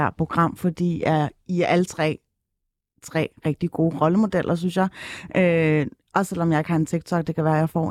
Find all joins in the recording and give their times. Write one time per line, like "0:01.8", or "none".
none